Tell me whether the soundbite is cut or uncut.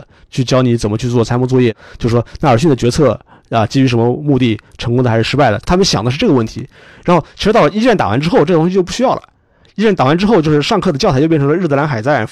uncut